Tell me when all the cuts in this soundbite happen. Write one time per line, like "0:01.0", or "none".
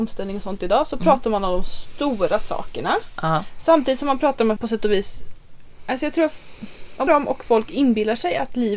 0:04.6
0:07.1